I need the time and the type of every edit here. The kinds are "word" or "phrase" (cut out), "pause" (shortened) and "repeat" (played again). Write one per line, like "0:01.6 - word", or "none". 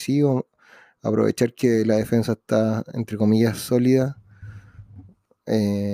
none

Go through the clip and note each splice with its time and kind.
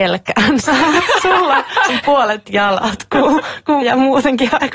0:01.9 - word
0:02.4 - word
0:03.8 - word

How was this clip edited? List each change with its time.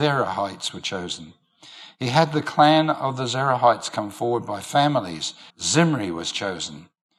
0:05.5 - pause

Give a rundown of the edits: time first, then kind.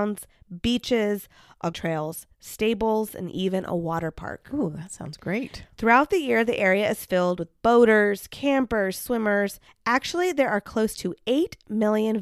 0:01.7 - phrase

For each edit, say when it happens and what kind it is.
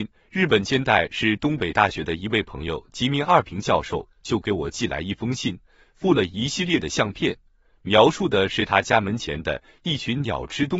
none

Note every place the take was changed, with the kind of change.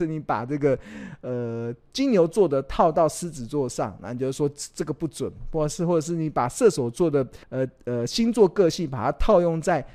0:07.4 - pause

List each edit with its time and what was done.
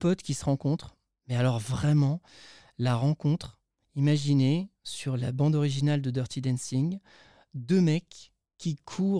none

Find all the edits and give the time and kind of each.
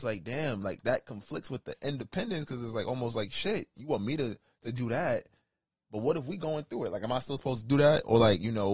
none

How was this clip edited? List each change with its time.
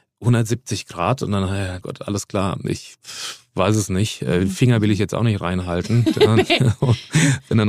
0:01.8 - word

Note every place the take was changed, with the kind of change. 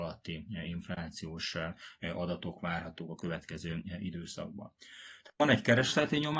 none

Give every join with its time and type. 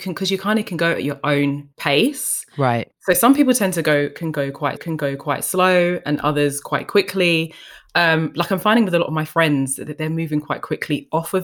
0:01.7 - pause
0:02.9 - word
0:04.8 - repeat

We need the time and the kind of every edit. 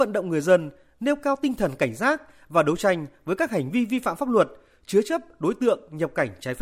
none

